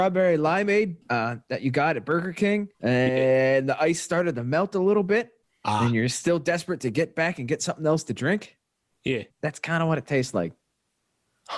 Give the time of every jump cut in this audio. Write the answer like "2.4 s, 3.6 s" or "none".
1.0 s, 2.7 s, 5.4 s, 9.3 s